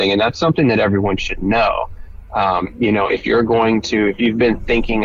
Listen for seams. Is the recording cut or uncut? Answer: uncut